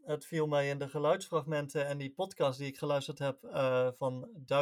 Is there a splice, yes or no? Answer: no